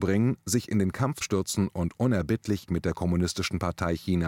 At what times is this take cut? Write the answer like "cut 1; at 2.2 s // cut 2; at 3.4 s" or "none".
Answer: cut 1; at 1.2 s // cut 2; at 2.7 s